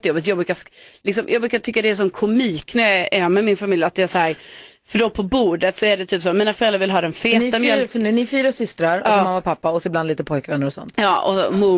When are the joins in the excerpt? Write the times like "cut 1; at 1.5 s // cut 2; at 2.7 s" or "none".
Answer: none